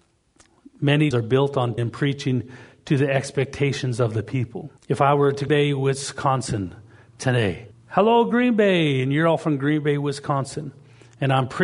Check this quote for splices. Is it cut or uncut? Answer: cut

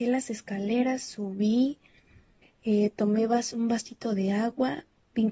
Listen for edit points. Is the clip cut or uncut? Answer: uncut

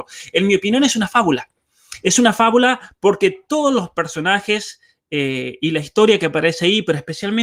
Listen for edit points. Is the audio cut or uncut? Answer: uncut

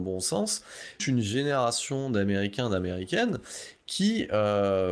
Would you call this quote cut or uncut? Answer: cut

